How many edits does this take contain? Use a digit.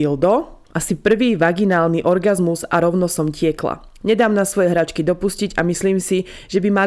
0